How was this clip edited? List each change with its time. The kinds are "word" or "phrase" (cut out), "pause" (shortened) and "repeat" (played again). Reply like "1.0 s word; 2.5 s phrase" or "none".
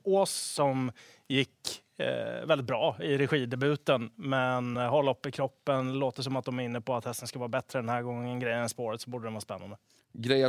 none